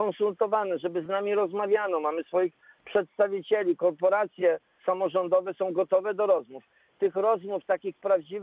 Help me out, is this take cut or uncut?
uncut